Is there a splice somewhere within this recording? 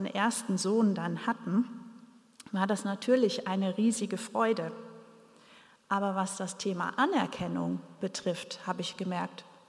no; 0 cuts

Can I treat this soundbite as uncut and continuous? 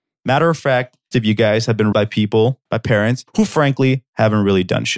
no; 4 cuts; at 1.1 s, 1.9 s, 2.7 s, 3.3 s

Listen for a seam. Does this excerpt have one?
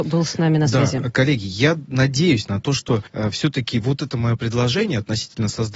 yes; 1 cut; at 3.1 s

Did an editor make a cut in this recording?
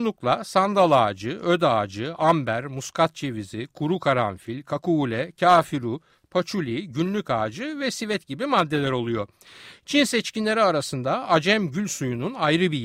no; 0 cuts

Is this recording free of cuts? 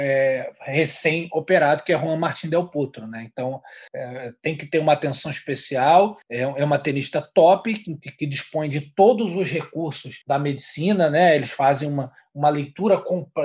no; 3 cuts; at 3.9 s, 6.2 s, 10.2 s

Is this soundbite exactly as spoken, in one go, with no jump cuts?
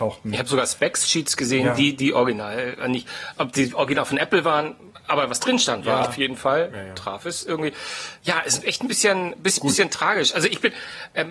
no; 1 cut; at 5.0 s

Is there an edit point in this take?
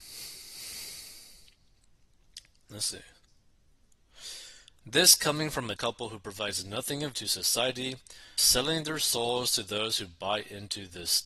yes; 3 cuts; at 5.8 s, 7.1 s, 8.4 s

